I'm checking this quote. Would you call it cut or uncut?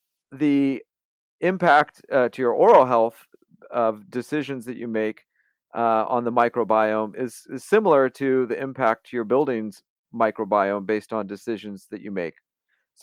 uncut